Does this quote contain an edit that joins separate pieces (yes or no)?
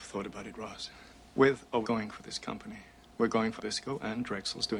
yes